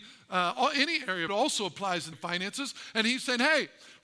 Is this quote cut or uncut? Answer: cut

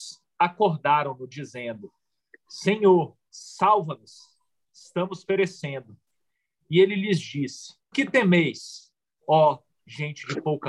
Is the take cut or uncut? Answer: cut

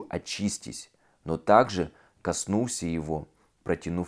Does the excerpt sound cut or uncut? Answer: uncut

